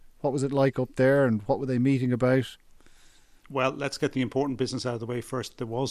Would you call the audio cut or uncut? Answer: uncut